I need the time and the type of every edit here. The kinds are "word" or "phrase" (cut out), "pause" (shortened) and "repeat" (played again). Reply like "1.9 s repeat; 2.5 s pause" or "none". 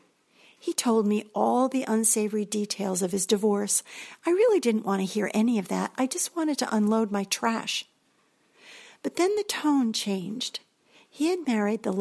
none